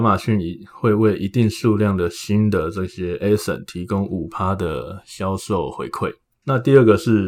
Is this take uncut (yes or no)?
yes